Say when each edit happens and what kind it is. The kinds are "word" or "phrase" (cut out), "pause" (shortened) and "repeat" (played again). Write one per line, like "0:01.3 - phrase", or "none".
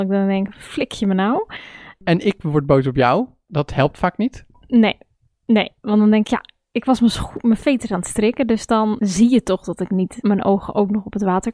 none